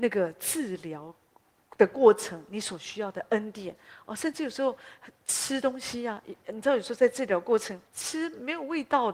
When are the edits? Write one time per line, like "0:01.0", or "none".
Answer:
0:07.9